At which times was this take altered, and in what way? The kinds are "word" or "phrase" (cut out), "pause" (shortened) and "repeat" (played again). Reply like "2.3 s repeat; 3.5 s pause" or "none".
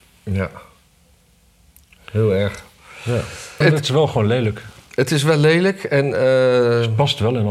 3.6 s phrase